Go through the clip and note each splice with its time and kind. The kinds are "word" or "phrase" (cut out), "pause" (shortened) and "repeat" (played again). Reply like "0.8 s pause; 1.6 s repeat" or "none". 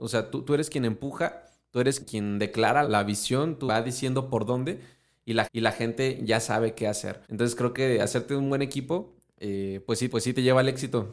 2.0 s word; 2.8 s word; 3.7 s phrase; 5.4 s repeat; 7.2 s pause; 10.1 s repeat